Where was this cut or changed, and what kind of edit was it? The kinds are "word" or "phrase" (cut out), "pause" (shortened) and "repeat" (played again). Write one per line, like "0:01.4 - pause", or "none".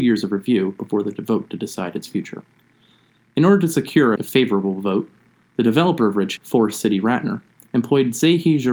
0:04.2 - word
0:06.4 - word